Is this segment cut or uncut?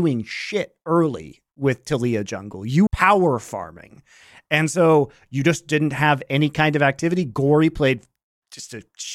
cut